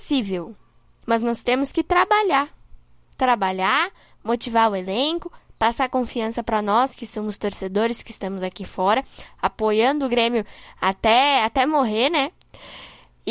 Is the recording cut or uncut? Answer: uncut